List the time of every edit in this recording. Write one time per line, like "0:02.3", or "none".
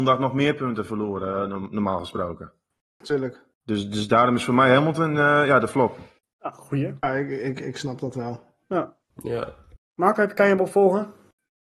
none